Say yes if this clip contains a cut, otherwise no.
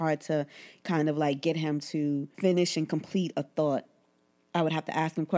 no